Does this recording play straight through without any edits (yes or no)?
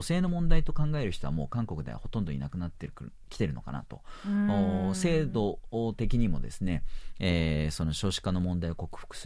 yes